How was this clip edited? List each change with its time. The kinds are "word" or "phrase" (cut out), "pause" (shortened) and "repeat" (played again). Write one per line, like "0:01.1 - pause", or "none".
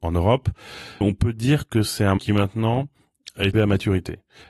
0:01.0 - word
0:02.2 - word
0:03.5 - word